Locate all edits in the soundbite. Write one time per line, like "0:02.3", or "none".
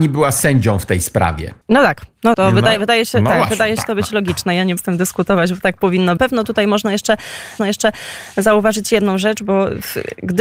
0:01.6
0:02.3
0:04.8
0:06.2
0:07.6